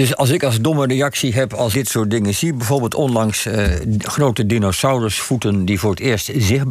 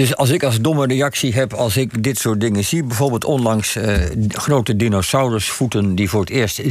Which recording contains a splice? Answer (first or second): first